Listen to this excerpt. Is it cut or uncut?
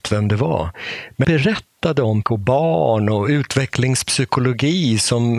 cut